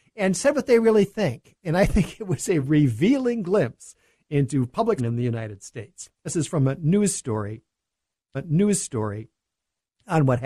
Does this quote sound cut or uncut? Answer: cut